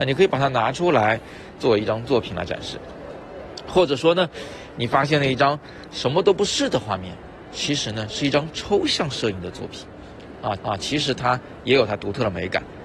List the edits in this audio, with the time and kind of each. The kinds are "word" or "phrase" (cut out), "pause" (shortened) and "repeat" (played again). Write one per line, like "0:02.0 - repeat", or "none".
0:10.6 - repeat